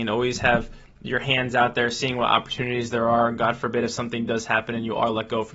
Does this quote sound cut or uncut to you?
uncut